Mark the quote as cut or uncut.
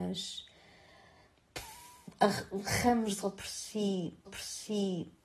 cut